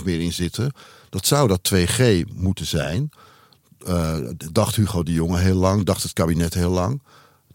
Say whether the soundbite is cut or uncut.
uncut